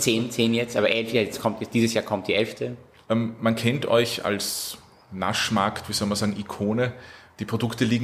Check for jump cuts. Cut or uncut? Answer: uncut